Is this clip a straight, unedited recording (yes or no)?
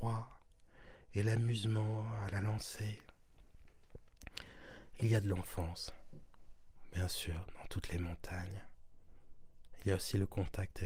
yes